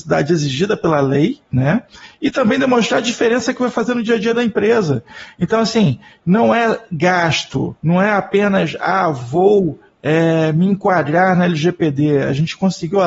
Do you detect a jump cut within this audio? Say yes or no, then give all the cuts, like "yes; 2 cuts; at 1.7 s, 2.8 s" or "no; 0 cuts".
yes; 2 cuts; at 1.4 s, 7.8 s